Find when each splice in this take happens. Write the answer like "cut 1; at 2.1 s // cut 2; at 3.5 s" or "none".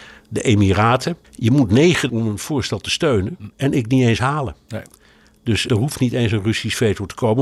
cut 1; at 1.2 s // cut 2; at 2.1 s // cut 3; at 3.5 s // cut 4; at 3.9 s // cut 5; at 5.7 s